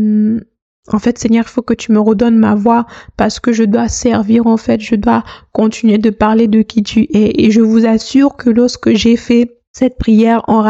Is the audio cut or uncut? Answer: uncut